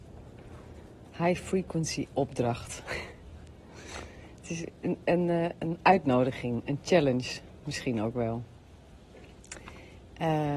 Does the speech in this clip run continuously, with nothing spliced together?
yes; 0 cuts

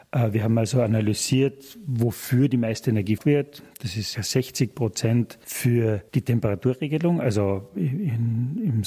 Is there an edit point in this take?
yes; 3 cuts; at 3.2 s, 4.1 s, 6.1 s

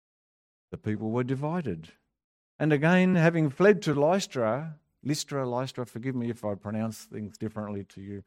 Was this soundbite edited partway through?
no; 0 cuts

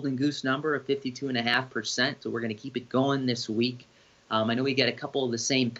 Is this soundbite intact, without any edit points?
yes; 0 cuts

